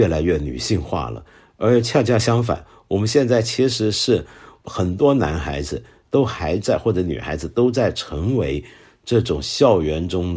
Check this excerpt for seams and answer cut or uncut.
uncut